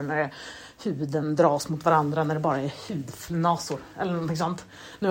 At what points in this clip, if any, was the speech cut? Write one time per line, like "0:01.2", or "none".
none